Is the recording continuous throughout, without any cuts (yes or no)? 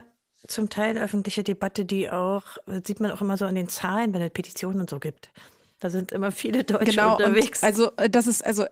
yes